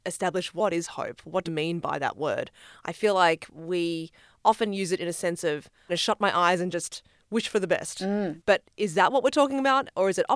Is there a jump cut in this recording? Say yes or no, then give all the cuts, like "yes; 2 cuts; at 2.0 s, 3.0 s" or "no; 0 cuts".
yes; 2 cuts; at 1.5 s, 5.9 s